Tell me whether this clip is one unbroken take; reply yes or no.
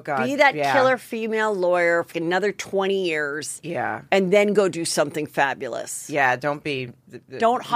no